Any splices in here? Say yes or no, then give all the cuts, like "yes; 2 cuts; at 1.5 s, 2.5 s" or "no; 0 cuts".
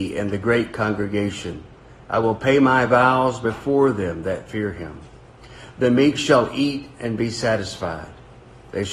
no; 0 cuts